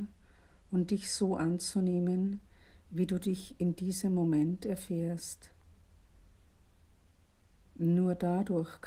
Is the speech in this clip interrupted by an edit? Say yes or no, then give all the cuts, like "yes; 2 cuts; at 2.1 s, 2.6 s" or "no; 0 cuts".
no; 0 cuts